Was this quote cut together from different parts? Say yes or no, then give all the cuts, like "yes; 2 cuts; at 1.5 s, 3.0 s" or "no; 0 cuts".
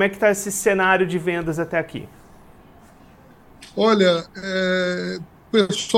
no; 0 cuts